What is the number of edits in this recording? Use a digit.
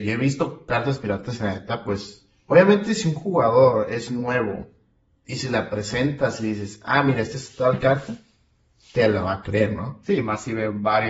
0